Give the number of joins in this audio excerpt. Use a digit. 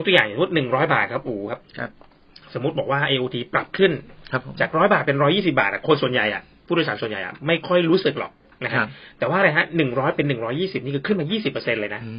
0